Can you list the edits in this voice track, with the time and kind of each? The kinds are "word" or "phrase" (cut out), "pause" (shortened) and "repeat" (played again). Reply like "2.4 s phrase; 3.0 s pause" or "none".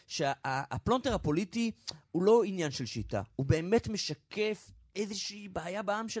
none